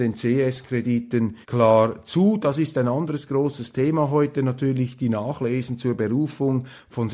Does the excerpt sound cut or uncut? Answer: cut